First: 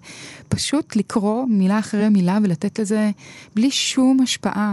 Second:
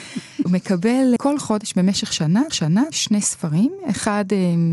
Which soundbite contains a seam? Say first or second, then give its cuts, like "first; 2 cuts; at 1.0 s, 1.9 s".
second; 2 cuts; at 1.2 s, 2.5 s